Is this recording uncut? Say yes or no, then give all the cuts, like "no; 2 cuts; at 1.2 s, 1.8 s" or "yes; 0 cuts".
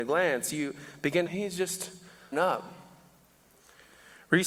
no; 2 cuts; at 1.3 s, 2.3 s